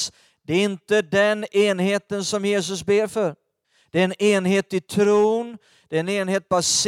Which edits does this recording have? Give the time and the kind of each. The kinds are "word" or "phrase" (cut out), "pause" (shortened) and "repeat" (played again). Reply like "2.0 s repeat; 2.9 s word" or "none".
3.6 s pause